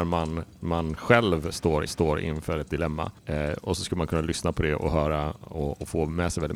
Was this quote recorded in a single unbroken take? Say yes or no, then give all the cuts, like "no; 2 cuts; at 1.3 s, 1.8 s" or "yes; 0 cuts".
no; 2 cuts; at 1.9 s, 3.2 s